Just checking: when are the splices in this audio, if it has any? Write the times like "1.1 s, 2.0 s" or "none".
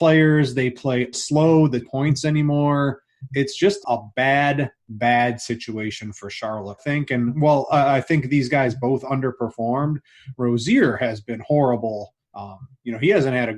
1.1 s, 1.8 s, 3.8 s, 4.8 s, 6.8 s, 12.2 s